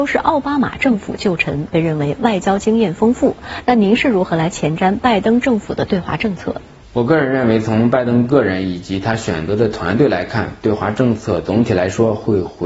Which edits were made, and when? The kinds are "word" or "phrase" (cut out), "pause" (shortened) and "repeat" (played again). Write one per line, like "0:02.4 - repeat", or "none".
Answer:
none